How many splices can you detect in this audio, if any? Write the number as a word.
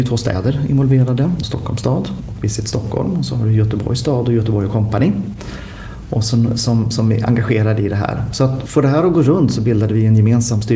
one